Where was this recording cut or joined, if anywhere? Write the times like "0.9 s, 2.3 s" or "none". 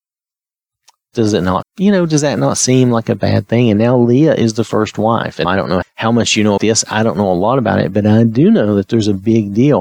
1.6 s, 5.4 s, 5.8 s, 6.6 s